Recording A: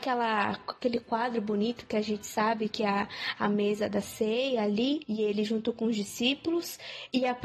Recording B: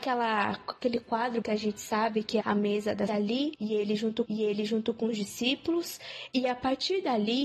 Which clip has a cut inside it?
B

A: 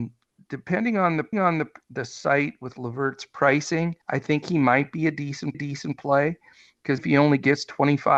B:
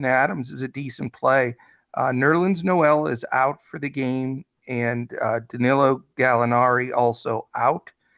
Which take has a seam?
A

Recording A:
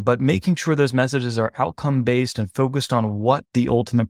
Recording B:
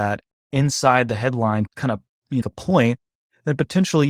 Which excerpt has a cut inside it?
B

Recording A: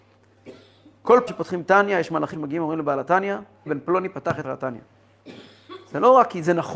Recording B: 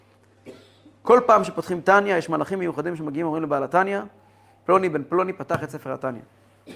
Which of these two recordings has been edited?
A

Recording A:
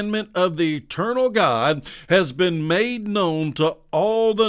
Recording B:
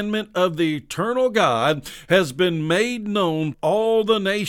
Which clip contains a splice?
B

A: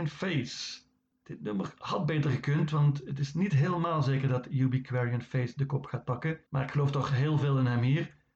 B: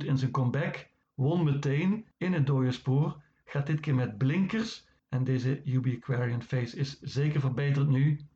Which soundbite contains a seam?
A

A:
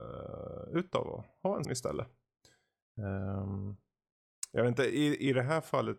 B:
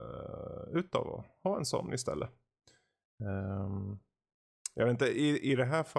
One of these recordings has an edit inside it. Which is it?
A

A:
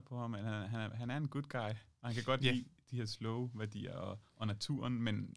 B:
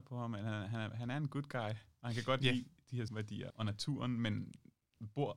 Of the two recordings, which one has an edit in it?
B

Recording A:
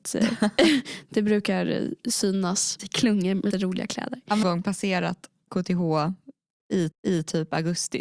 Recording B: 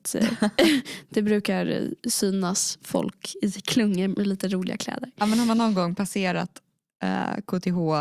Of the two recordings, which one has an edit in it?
A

